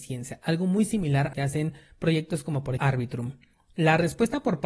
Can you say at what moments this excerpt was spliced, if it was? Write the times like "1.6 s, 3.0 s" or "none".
1.3 s, 2.8 s

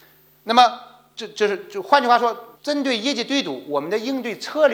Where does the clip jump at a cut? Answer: 2.6 s

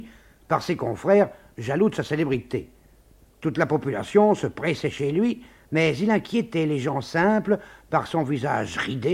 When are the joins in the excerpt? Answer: none

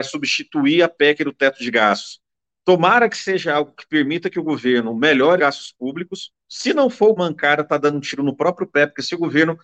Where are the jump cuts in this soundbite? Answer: 5.4 s, 6.4 s, 7.2 s

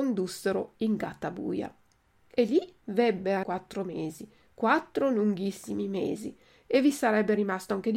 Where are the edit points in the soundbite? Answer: 3.4 s

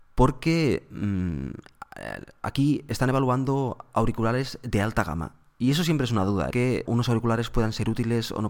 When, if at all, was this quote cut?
6.5 s, 6.9 s

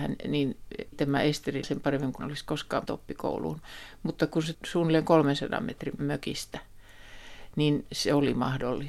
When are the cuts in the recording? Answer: 0.9 s, 1.6 s, 2.2 s, 2.9 s, 4.5 s, 6.0 s

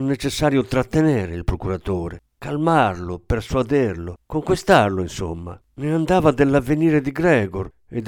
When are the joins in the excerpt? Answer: 2.3 s, 4.2 s, 5.6 s

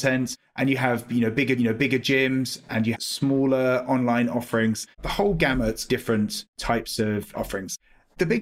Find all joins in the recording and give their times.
1.6 s, 2.9 s, 4.9 s, 5.9 s

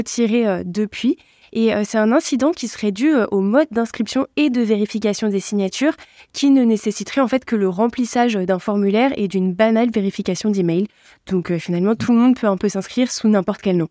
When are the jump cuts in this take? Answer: none

